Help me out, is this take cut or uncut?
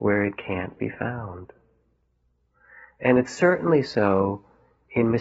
uncut